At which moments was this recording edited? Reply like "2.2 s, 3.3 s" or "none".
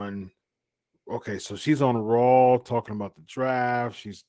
none